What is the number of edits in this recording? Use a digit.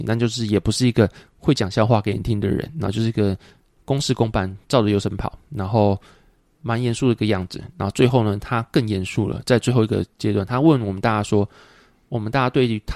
0